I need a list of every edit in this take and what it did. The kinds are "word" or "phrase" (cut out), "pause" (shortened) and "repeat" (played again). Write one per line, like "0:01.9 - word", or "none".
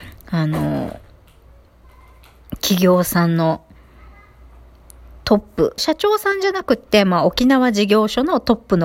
0:05.8 - phrase